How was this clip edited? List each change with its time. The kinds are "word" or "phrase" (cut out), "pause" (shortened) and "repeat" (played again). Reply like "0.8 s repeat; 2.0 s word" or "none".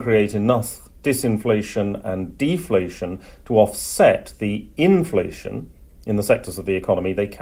none

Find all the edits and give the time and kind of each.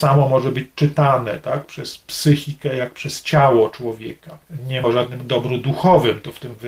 4.8 s word

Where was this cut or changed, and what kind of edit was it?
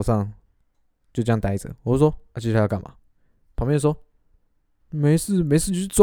none

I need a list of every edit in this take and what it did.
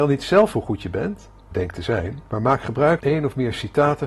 1.5 s word; 2.3 s pause; 3.0 s word

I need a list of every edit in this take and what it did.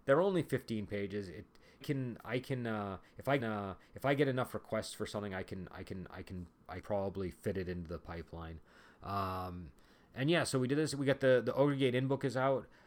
1.8 s phrase; 3.4 s repeat; 5.8 s repeat; 6.8 s word

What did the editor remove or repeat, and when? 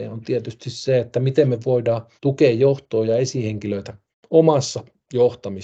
2.2 s pause; 4.1 s pause

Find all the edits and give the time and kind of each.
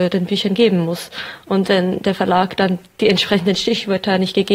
none

